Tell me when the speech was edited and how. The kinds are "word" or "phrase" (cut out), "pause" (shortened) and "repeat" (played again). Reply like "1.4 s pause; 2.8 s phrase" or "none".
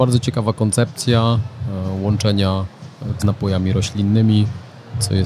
3.2 s word